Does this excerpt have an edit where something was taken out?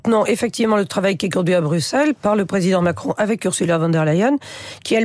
no; 0 cuts

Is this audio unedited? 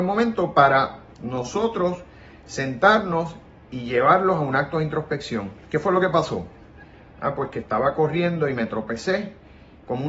yes; 0 cuts

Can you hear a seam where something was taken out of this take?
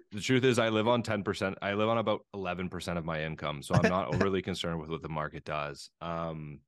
no; 0 cuts

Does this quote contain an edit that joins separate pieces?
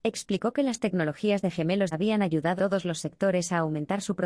yes; 2 cuts; at 1.9 s, 2.6 s

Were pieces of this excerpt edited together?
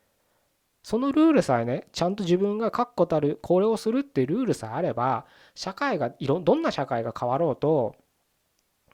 no; 0 cuts

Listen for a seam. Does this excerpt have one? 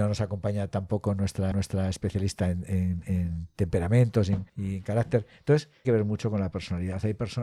yes; 3 cuts; at 1.5 s, 4.5 s, 5.8 s

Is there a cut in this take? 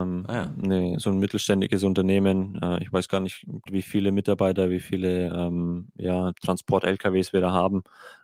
yes; 1 cut; at 3.7 s

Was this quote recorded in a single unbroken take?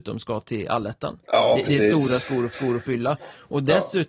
no; 2 cuts; at 1.2 s, 2.5 s

